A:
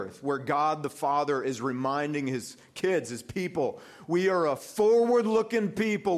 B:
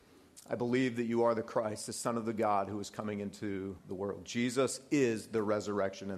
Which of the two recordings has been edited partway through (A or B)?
B